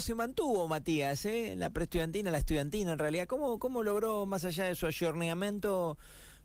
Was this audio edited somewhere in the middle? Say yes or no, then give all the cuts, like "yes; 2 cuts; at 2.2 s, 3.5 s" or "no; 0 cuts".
no; 0 cuts